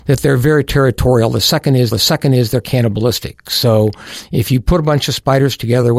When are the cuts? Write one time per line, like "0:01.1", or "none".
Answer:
0:01.9